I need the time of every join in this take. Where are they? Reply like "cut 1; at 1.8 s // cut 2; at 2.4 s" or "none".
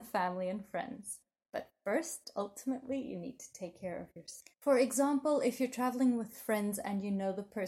cut 1; at 1.3 s // cut 2; at 4.5 s